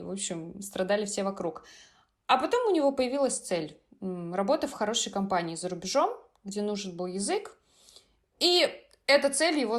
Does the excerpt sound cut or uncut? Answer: uncut